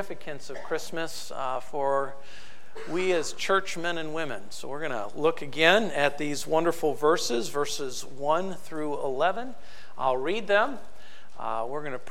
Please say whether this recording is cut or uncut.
uncut